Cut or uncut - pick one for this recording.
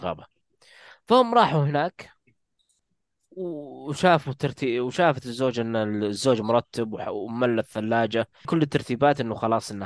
cut